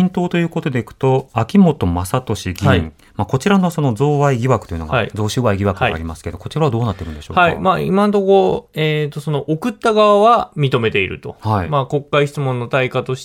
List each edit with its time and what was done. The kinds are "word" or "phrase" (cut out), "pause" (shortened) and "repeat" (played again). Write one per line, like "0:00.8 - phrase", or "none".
none